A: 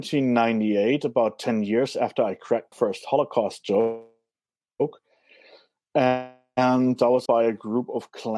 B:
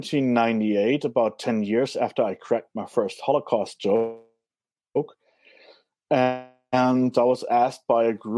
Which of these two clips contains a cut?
A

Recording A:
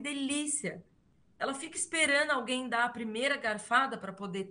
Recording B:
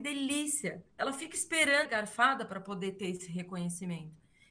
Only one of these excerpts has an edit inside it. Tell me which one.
B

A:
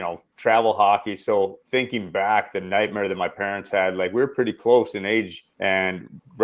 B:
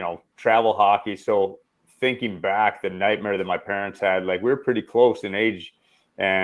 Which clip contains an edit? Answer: A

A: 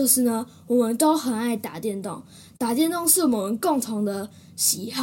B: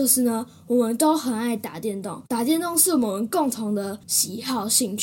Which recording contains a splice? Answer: B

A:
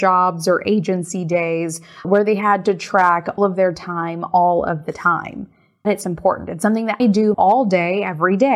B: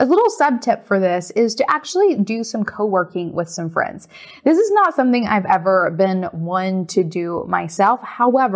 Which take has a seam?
A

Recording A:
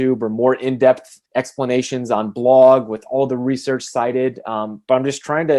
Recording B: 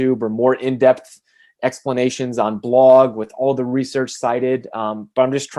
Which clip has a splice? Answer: A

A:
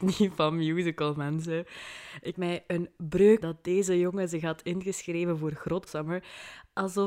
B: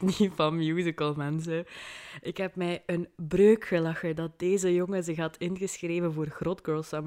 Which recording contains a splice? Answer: A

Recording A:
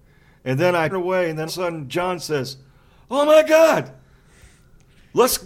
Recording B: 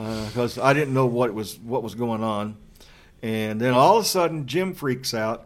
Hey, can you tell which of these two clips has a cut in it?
A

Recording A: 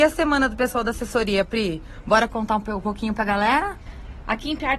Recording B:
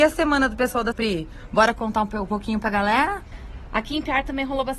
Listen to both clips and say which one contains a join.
B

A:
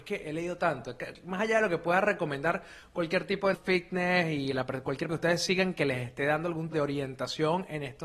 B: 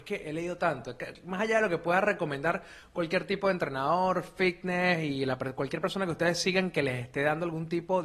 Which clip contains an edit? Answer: A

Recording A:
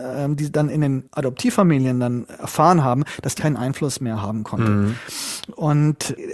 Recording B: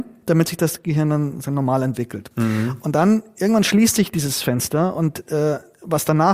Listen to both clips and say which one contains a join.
A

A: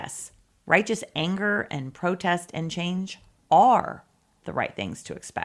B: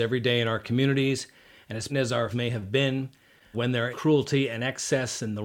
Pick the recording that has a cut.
B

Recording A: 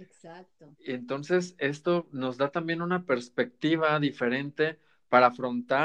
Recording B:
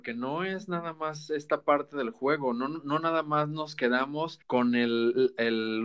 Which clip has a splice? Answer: B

